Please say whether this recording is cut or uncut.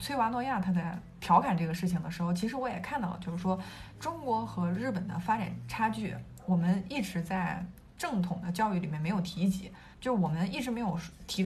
cut